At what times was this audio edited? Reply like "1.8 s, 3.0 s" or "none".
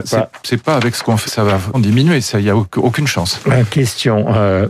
1.3 s, 1.7 s